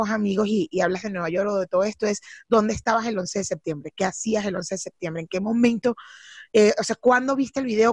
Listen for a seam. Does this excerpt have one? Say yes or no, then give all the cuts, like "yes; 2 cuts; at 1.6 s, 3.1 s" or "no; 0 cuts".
no; 0 cuts